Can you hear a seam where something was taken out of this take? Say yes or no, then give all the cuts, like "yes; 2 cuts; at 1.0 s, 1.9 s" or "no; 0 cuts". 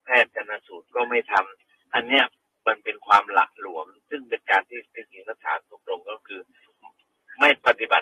no; 0 cuts